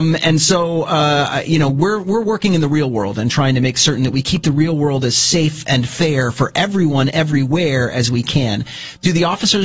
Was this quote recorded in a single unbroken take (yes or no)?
yes